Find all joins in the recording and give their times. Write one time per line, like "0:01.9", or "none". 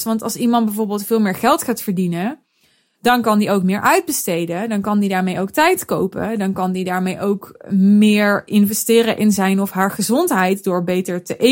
none